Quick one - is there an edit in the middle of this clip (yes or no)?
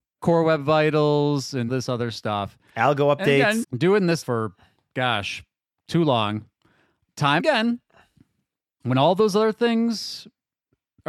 yes